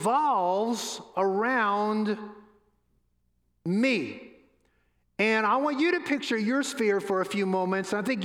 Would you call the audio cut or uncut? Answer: uncut